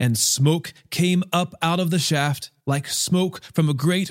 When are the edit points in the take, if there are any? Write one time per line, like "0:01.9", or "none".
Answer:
0:02.6